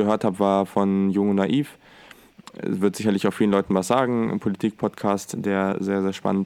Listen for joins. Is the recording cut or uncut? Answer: uncut